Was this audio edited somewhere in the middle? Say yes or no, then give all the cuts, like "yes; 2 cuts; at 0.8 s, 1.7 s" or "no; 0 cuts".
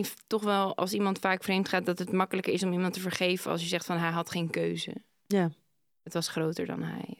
no; 0 cuts